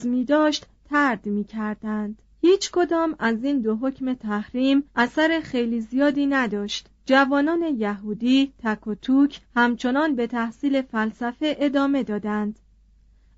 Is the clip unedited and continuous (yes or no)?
no